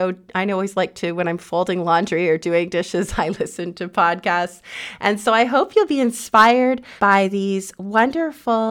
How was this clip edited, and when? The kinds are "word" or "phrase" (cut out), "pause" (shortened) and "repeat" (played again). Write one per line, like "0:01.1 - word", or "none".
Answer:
0:07.0 - pause